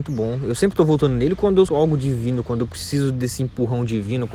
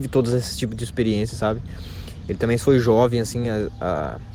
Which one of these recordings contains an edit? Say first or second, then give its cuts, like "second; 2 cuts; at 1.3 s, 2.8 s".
first; 1 cut; at 1.7 s